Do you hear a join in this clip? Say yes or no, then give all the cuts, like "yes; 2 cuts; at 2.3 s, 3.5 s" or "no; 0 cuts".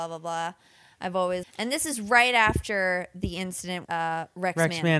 yes; 2 cuts; at 1.4 s, 3.8 s